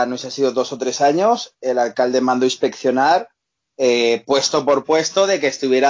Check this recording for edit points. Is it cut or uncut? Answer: uncut